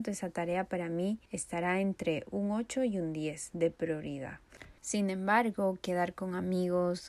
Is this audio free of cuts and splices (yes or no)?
no